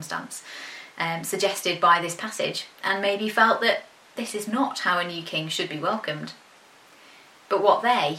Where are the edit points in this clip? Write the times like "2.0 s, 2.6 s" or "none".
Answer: none